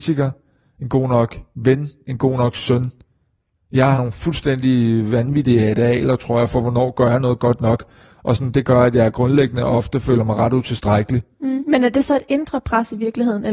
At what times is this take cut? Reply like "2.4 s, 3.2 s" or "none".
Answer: 3.9 s